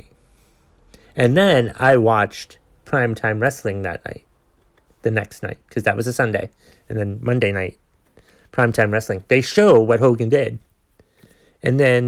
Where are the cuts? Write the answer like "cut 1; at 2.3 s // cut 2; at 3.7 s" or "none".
none